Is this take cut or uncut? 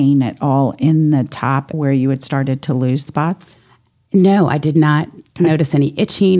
cut